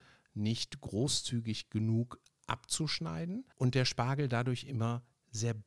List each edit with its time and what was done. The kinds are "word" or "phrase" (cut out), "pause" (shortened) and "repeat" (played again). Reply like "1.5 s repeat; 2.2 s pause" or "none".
3.5 s pause